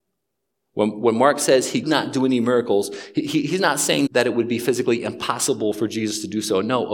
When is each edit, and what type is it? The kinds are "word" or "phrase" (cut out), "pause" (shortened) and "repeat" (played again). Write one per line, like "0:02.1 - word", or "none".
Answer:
0:01.8 - word
0:04.1 - word